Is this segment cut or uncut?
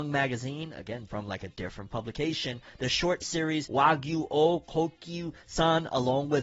cut